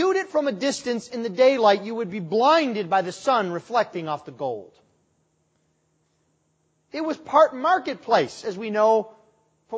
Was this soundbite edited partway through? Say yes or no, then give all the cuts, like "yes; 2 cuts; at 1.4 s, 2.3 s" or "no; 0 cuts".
no; 0 cuts